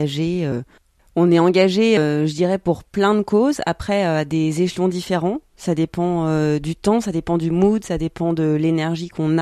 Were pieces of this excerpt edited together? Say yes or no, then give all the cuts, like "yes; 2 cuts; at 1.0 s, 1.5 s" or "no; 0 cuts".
no; 0 cuts